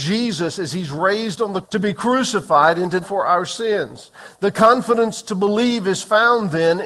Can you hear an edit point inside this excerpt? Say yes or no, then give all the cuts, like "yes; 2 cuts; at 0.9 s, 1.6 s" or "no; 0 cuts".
yes; 2 cuts; at 1.6 s, 3.0 s